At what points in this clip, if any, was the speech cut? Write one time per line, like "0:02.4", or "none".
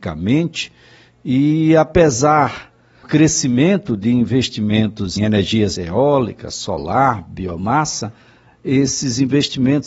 0:03.0
0:05.2
0:05.8

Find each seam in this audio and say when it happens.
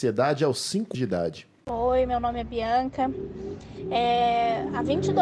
0:00.9

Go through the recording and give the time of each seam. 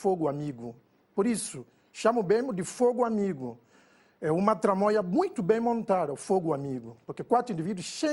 none

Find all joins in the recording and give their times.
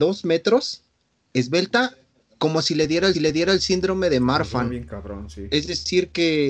0:02.3
0:03.1

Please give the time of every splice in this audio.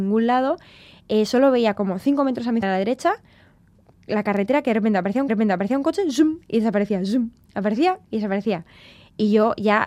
0:02.6
0:05.3

